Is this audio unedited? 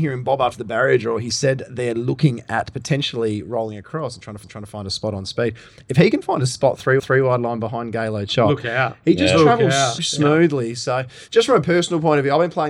no; 3 cuts; at 4.4 s, 7.0 s, 10.0 s

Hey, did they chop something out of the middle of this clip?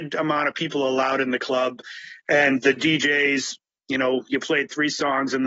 no; 0 cuts

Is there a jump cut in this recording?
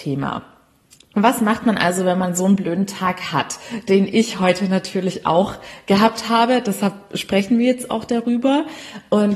no; 0 cuts

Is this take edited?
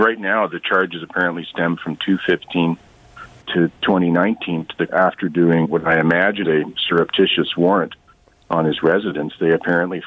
yes; 4 cuts; at 3.4 s, 4.9 s, 5.6 s, 6.4 s

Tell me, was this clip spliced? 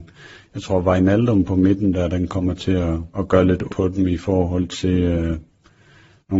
yes; 2 cuts; at 3.1 s, 3.7 s

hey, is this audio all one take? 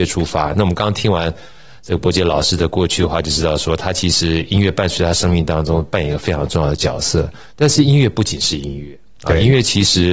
no; 1 cut; at 7.5 s

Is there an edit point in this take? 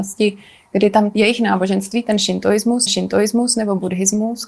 yes; 2 cuts; at 1.1 s, 2.9 s

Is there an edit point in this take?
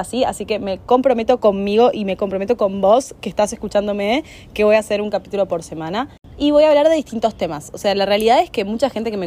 no; 0 cuts

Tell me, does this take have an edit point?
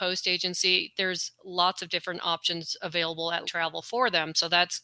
yes; 1 cut; at 3.4 s

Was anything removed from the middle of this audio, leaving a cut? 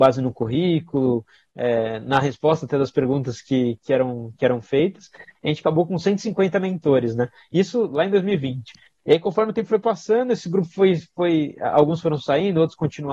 no; 0 cuts

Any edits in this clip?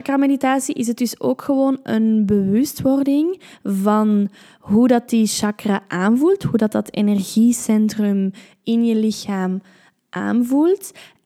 no; 0 cuts

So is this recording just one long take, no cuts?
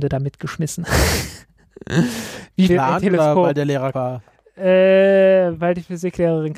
no; 2 cuts; at 2.7 s, 3.9 s

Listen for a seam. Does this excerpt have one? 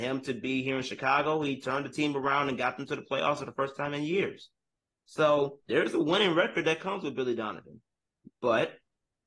yes; 1 cut; at 5.6 s

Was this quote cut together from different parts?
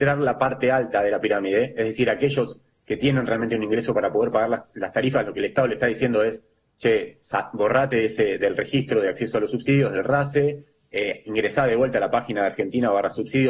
no; 0 cuts

